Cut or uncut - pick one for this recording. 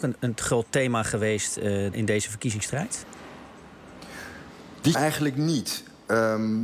cut